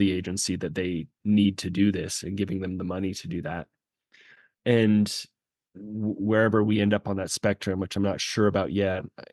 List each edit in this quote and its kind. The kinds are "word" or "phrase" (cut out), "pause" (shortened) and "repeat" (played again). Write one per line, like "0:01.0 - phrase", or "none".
none